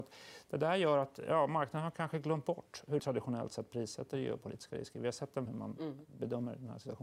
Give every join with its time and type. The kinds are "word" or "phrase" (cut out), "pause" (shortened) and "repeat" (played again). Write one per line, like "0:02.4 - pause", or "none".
0:03.0 - word
0:05.5 - phrase

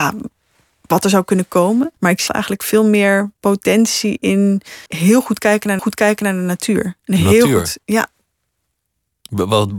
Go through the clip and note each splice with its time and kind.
0:02.0 - pause
0:02.3 - word
0:03.4 - pause
0:04.9 - pause
0:05.8 - repeat
0:07.0 - pause

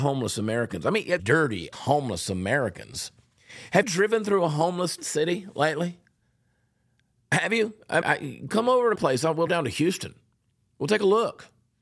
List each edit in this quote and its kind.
0:01.2 - word
0:01.7 - word
0:03.8 - word
0:05.0 - word
0:08.0 - word
0:08.5 - word
0:08.9 - word
0:09.5 - word

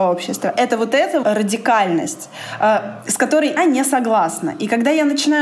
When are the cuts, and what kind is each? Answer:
0:01.2 - word
0:03.6 - word

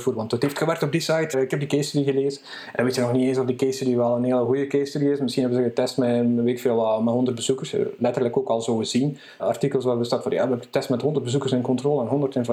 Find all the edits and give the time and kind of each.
0:01.3 - word
0:09.4 - word

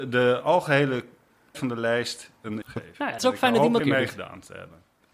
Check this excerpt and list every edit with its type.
0:01.5 - word
0:02.6 - word
0:03.2 - word
0:03.8 - word

